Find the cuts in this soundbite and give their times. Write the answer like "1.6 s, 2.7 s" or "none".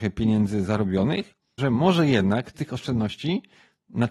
1.6 s, 2.5 s